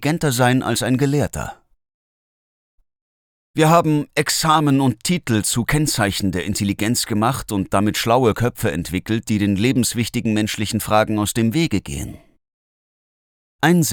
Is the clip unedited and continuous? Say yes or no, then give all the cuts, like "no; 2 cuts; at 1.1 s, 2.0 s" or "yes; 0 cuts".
yes; 0 cuts